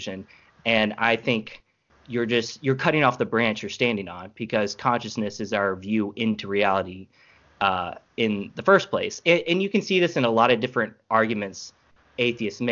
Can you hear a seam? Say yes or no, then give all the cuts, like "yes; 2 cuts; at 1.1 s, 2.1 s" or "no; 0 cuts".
no; 0 cuts